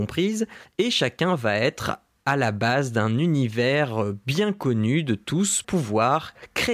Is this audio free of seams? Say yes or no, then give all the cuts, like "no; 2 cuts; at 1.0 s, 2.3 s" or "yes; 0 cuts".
no; 1 cut; at 5.6 s